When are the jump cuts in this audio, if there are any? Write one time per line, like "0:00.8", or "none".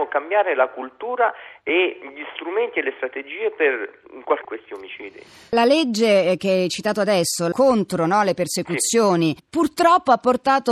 0:04.4